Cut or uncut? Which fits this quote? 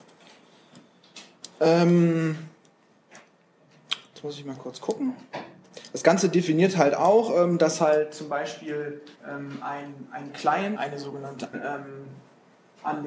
cut